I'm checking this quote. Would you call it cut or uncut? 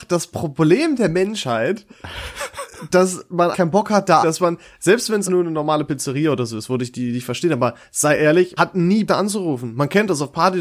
cut